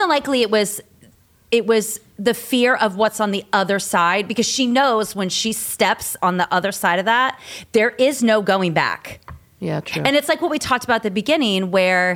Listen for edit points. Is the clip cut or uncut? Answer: uncut